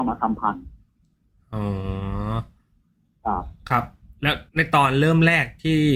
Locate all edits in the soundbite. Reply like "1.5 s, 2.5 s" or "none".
4.5 s